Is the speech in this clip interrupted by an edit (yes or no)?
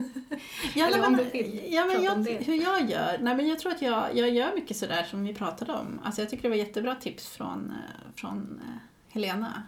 no